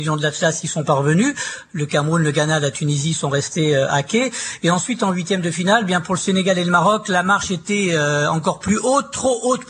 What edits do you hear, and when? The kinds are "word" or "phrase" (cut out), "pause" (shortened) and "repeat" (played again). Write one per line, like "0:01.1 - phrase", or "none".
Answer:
none